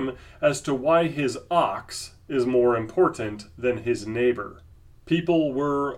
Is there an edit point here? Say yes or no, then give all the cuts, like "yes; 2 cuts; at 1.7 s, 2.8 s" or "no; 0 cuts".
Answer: no; 0 cuts